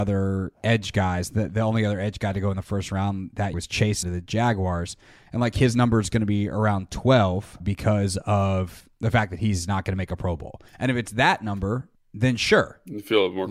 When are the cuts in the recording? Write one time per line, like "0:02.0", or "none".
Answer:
0:03.5
0:04.0
0:07.6
0:08.9
0:10.7
0:11.9